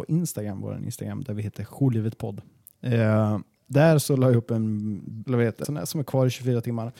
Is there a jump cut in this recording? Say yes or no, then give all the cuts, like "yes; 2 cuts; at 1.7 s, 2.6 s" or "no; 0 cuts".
yes; 2 cuts; at 5.2 s, 5.6 s